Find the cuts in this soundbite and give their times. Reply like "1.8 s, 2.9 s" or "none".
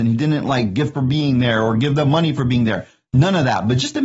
0.9 s